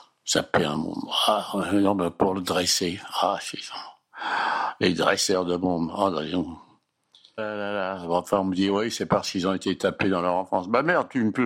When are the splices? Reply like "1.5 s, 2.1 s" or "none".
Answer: 7.4 s